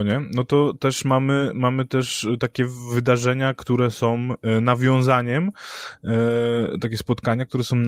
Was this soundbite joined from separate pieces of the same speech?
no; 0 cuts

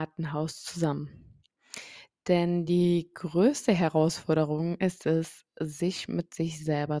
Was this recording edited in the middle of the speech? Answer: no; 0 cuts

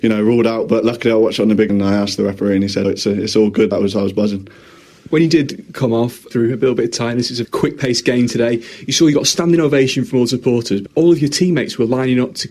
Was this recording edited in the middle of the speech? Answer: yes; 6 cuts; at 1.7 s, 2.8 s, 3.7 s, 6.3 s, 7.4 s, 10.9 s

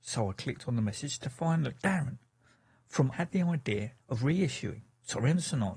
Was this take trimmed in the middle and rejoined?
yes; 2 cuts; at 3.1 s, 4.0 s

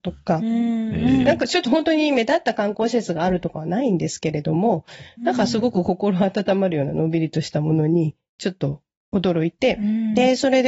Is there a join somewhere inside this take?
no; 0 cuts

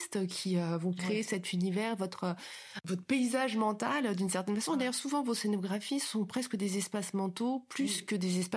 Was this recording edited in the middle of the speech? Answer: no; 0 cuts

